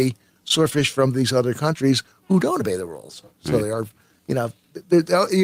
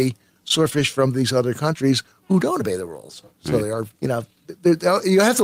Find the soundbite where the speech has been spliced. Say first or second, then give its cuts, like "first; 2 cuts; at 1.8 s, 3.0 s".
second; 1 cut; at 3.9 s